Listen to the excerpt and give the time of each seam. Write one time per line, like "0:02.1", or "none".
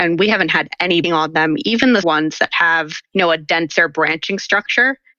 0:01.0
0:02.0